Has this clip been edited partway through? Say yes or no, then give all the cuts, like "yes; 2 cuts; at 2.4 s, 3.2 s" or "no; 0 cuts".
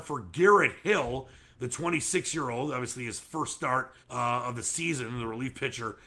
yes; 1 cut; at 4.0 s